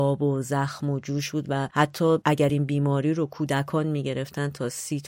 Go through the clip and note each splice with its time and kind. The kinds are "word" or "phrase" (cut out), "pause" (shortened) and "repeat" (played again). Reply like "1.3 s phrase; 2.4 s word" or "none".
none

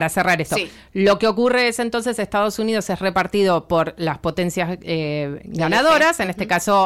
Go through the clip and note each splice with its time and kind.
none

